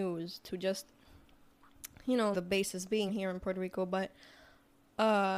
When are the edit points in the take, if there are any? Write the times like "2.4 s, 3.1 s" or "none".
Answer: 2.3 s, 3.1 s